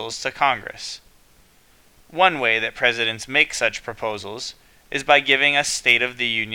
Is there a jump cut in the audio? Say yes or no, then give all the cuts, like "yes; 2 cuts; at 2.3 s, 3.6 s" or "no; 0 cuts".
no; 0 cuts